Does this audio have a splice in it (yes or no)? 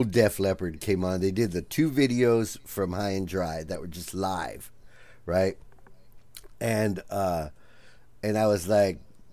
no